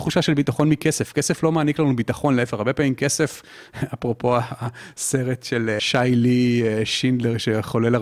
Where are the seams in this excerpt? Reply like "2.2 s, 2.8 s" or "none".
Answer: none